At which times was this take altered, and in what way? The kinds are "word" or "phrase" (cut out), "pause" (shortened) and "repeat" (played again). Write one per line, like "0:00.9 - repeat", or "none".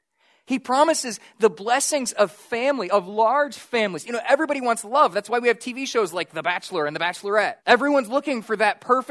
0:07.6 - pause